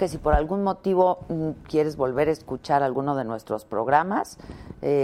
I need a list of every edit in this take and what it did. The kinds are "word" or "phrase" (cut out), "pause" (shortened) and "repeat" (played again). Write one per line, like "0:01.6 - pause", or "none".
none